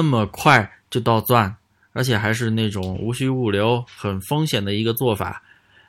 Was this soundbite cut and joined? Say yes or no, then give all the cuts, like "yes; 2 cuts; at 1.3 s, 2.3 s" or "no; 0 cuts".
no; 0 cuts